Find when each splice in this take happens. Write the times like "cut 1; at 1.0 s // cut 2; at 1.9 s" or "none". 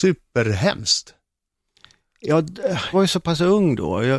cut 1; at 2.9 s